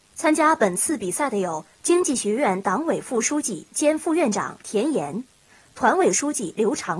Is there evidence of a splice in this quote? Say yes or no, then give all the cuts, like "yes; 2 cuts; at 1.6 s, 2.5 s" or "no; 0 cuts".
no; 0 cuts